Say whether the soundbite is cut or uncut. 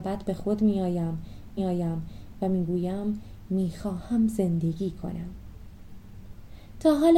cut